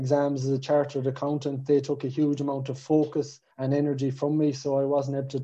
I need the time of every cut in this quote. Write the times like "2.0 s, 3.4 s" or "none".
3.5 s